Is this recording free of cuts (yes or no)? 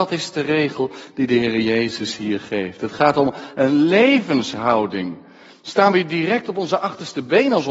yes